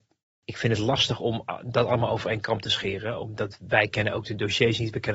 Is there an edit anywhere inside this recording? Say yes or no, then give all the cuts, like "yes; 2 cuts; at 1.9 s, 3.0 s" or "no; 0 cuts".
no; 0 cuts